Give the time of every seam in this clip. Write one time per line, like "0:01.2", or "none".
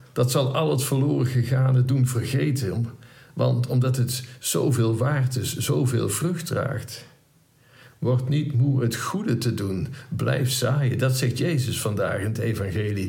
none